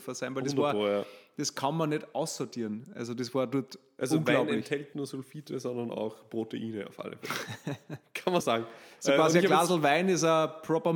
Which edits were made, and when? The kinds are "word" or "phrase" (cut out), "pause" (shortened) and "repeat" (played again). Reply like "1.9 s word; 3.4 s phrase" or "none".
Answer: 4.9 s word; 8.4 s word